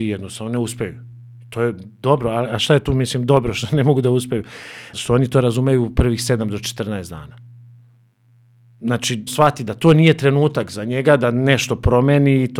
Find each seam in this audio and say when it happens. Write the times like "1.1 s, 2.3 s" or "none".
4.9 s, 9.3 s